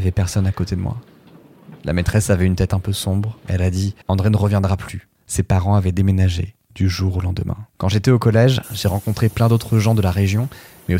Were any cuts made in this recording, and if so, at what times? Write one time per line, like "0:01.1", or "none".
0:04.0
0:05.1
0:06.6
0:07.7